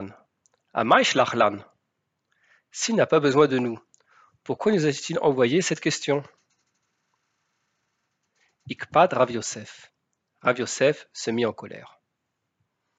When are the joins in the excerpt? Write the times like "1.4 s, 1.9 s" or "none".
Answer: none